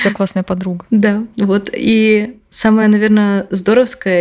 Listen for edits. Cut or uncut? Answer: uncut